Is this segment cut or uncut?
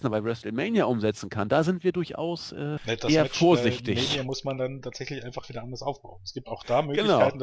cut